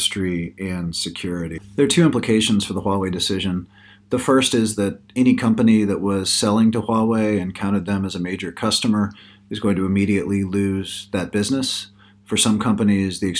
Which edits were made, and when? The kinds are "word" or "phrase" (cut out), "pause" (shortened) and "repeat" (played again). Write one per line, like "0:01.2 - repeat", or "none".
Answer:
none